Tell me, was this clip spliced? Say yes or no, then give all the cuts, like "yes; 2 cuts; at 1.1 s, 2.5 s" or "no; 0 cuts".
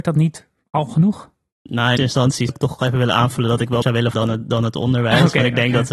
yes; 5 cuts; at 2.0 s, 2.5 s, 2.8 s, 3.8 s, 4.1 s